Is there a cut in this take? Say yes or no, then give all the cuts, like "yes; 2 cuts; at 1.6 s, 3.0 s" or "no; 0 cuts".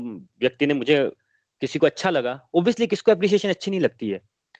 no; 0 cuts